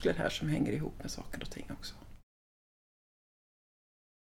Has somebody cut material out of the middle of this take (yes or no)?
no